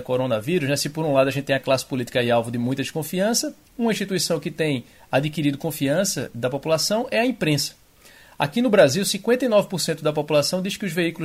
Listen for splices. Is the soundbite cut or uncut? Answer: uncut